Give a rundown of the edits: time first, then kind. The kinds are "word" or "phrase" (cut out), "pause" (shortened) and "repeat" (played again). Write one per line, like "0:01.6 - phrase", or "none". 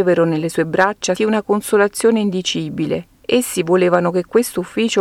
0:01.2 - word
0:03.1 - pause

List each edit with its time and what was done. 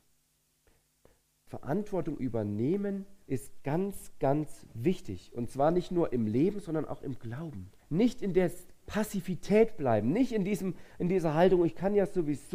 0:03.2 - pause
0:07.8 - pause

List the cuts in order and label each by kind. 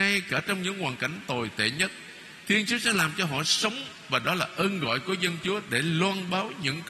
none

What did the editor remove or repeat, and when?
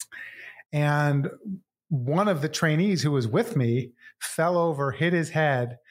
none

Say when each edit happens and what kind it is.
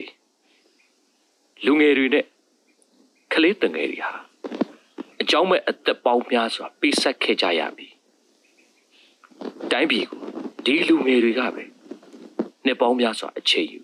0:05.1 - pause

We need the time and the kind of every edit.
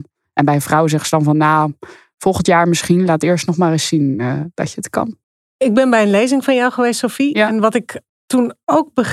none

